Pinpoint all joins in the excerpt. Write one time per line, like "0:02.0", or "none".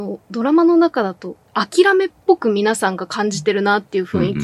0:01.4